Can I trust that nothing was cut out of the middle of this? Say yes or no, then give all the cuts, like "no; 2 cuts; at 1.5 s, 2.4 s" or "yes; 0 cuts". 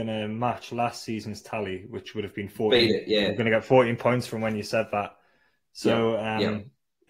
yes; 0 cuts